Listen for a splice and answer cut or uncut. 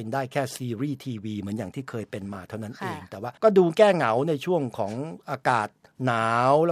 cut